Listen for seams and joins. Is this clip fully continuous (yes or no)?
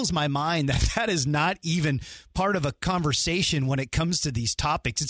yes